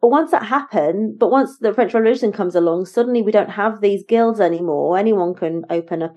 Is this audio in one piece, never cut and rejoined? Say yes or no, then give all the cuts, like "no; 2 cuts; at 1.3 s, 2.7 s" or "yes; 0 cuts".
yes; 0 cuts